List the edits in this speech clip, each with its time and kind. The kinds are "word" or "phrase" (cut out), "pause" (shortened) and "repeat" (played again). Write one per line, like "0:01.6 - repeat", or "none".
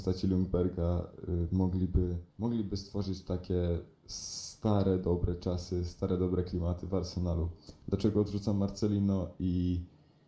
0:02.3 - pause